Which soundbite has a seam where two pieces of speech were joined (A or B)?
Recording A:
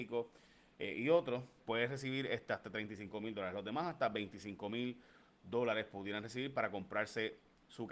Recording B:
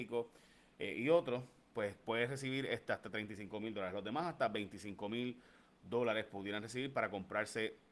A